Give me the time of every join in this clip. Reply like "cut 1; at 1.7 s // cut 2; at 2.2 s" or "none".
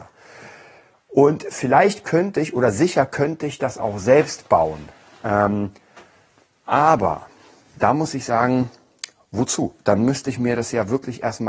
none